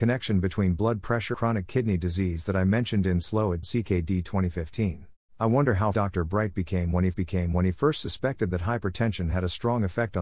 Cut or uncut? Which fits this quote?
cut